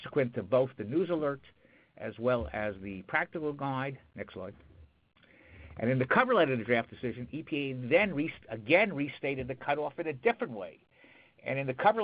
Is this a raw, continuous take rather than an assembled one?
yes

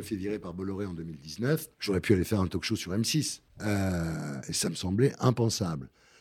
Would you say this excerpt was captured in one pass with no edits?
no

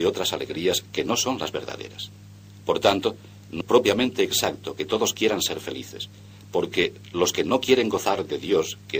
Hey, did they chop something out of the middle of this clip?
yes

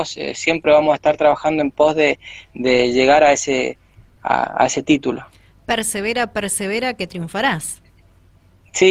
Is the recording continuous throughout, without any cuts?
yes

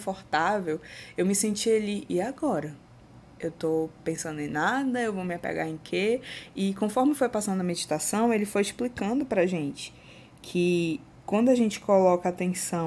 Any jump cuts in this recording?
yes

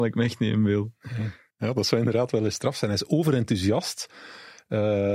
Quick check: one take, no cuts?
yes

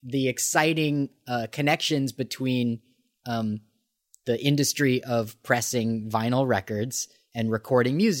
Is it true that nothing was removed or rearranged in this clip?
yes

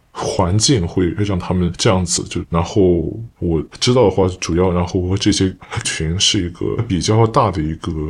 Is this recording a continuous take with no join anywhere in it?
no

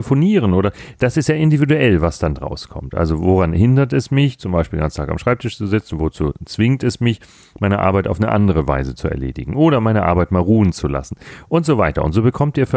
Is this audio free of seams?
no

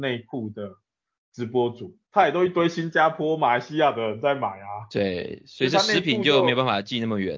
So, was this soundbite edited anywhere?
yes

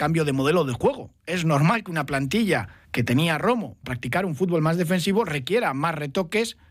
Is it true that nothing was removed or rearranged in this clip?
no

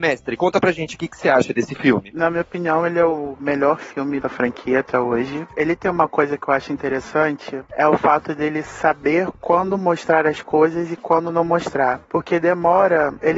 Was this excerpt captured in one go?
no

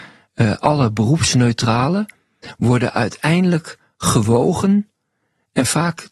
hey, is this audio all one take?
yes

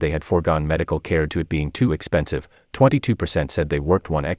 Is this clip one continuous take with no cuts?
no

